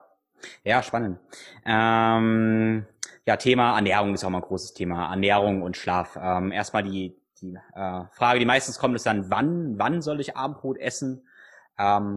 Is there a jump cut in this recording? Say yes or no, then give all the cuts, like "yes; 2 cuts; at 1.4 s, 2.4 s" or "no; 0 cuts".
no; 0 cuts